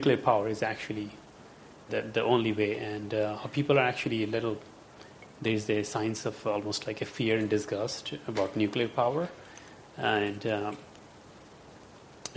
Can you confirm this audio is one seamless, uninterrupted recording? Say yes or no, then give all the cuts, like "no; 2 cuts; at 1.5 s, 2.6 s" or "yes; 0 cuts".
no; 1 cut; at 1.9 s